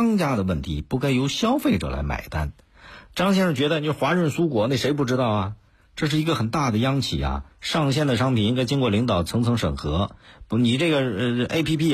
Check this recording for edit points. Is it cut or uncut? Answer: cut